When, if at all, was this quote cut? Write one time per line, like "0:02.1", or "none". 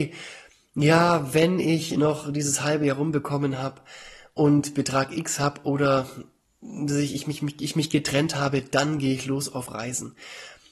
none